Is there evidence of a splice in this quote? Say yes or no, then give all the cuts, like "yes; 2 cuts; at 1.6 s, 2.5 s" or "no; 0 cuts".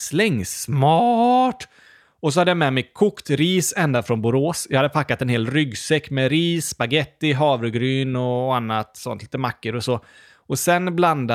no; 0 cuts